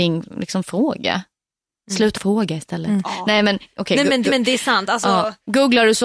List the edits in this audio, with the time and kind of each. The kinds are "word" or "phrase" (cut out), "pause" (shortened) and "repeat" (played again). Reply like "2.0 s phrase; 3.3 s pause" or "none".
2.1 s word; 4.2 s repeat